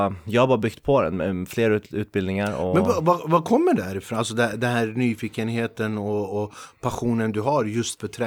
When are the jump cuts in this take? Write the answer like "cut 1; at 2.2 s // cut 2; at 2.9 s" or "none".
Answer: none